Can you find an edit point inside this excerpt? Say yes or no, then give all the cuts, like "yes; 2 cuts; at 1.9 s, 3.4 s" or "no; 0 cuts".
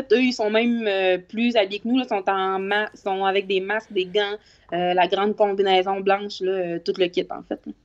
no; 0 cuts